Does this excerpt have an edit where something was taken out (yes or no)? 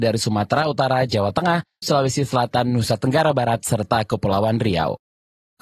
yes